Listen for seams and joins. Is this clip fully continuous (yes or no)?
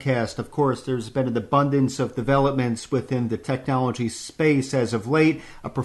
yes